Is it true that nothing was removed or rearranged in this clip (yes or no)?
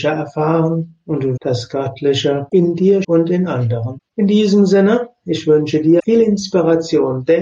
no